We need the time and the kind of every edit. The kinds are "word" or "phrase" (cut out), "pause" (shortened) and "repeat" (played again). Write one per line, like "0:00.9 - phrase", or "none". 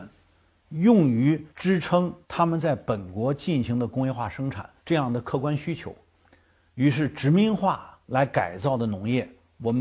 0:01.5 - pause
0:02.2 - pause
0:04.8 - pause
0:08.0 - pause